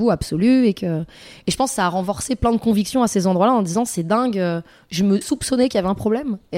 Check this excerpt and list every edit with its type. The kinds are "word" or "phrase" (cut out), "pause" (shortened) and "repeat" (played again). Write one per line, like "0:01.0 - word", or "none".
0:05.2 - word